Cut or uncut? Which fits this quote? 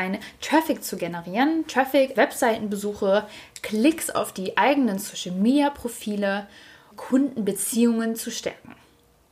cut